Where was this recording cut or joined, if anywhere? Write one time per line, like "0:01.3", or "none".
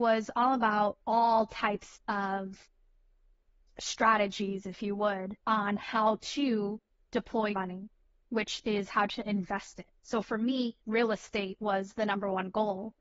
0:01.0
0:05.4
0:07.5
0:10.8